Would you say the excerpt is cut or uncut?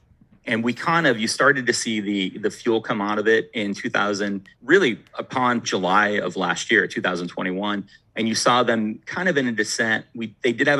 cut